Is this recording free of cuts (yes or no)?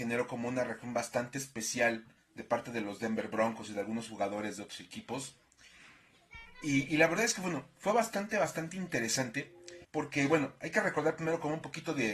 no